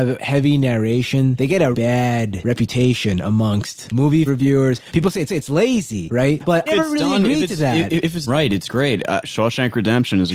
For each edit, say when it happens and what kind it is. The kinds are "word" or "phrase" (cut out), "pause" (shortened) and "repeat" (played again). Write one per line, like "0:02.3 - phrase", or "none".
0:01.7 - word
0:04.3 - phrase
0:05.3 - repeat
0:06.7 - phrase
0:08.3 - word